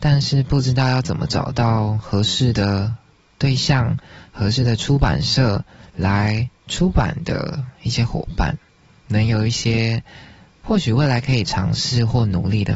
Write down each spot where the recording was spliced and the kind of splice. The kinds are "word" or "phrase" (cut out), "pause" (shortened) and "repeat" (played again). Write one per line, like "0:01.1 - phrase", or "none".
none